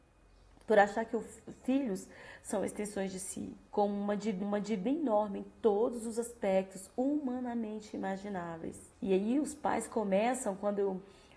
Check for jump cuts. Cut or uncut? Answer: cut